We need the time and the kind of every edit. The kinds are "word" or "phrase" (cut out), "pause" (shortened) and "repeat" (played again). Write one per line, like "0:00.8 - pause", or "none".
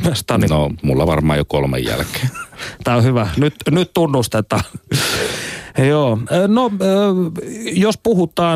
none